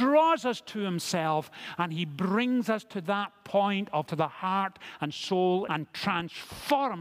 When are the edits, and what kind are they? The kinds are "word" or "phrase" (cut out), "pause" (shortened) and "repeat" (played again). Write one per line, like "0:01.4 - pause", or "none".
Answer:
0:04.1 - word
0:05.7 - phrase